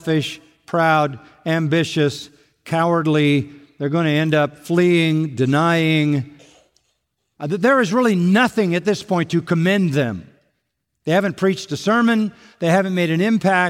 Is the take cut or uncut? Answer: uncut